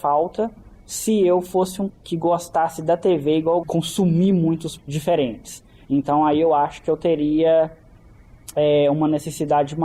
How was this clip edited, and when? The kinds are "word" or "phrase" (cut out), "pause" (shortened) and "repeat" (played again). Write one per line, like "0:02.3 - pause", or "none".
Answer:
0:01.9 - word
0:03.6 - phrase
0:04.8 - word